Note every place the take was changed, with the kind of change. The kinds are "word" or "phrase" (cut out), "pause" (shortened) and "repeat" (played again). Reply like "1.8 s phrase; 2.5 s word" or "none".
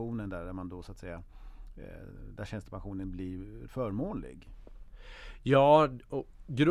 3.7 s word